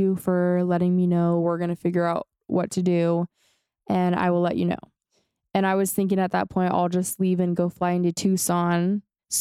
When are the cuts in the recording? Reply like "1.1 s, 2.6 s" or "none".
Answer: none